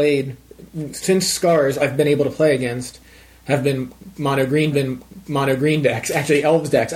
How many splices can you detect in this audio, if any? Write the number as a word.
two